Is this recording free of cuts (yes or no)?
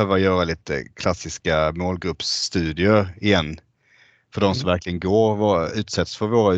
yes